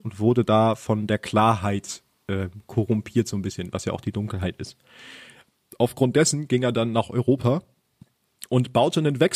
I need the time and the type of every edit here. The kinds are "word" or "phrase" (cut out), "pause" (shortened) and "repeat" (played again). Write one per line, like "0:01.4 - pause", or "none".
none